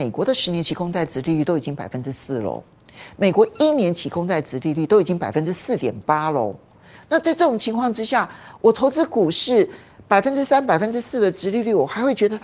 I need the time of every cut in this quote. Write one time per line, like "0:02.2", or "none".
none